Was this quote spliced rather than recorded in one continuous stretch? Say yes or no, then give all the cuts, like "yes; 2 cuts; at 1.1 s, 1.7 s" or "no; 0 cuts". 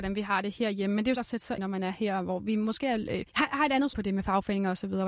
yes; 4 cuts; at 1.2 s, 1.6 s, 3.3 s, 3.9 s